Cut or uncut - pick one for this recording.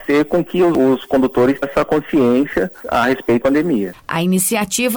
cut